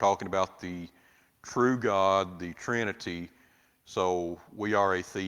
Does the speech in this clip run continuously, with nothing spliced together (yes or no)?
yes